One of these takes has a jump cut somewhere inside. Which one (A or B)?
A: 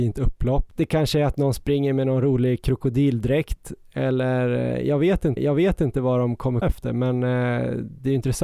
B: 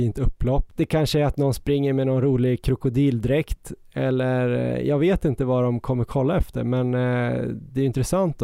A